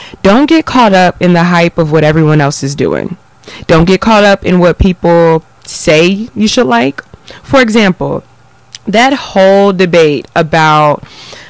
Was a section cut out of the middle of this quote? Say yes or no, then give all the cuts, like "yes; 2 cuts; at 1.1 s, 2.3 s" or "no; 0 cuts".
no; 0 cuts